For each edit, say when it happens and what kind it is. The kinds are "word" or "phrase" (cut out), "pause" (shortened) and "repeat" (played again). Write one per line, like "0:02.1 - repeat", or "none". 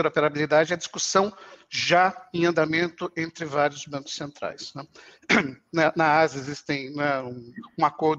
none